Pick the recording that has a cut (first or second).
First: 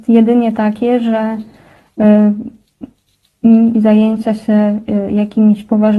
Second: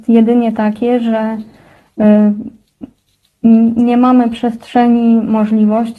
first